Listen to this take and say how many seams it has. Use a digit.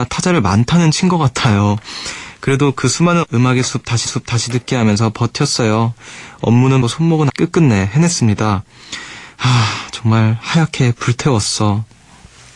4